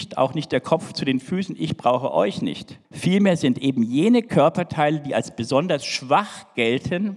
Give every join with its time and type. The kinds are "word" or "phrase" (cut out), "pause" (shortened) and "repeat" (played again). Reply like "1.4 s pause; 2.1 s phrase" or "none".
2.8 s pause